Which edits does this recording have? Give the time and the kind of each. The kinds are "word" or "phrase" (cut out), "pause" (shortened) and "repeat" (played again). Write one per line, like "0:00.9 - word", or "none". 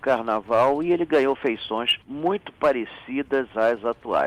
0:02.0 - pause